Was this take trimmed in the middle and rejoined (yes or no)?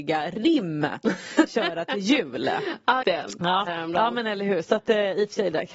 yes